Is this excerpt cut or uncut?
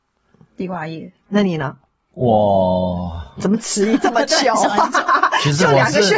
cut